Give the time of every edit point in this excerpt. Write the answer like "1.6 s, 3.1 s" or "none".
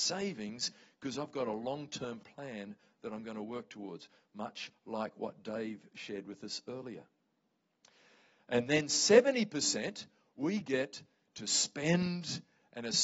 none